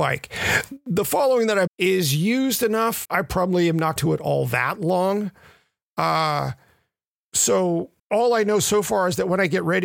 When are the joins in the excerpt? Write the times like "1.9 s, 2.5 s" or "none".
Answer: 1.7 s, 3.0 s, 4.0 s, 8.0 s

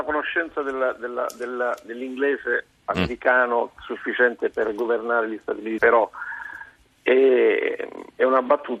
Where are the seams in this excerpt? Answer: 5.8 s

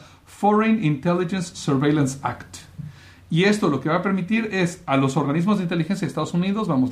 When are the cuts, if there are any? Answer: none

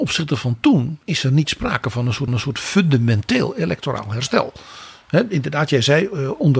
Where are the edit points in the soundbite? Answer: 1.0 s, 2.3 s

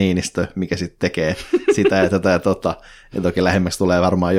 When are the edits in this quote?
none

